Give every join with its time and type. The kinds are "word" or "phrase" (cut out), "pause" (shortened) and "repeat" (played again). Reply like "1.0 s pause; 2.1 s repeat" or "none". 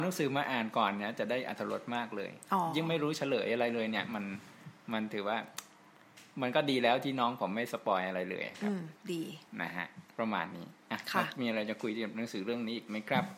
9.5 s pause; 10.1 s pause